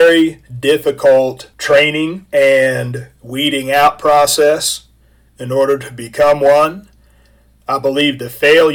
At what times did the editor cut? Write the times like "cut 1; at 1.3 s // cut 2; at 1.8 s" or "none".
none